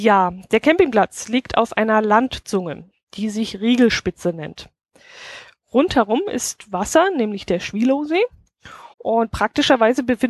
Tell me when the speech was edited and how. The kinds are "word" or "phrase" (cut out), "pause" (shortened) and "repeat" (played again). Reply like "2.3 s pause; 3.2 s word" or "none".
8.9 s pause

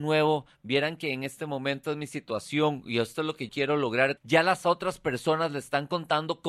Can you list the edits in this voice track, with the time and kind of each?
1.8 s word; 3.5 s word; 4.2 s word

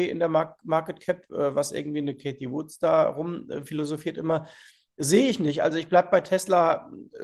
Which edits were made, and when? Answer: none

